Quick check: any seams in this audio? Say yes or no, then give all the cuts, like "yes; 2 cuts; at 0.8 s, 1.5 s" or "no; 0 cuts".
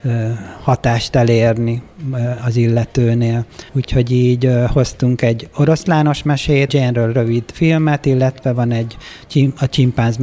yes; 2 cuts; at 3.7 s, 6.7 s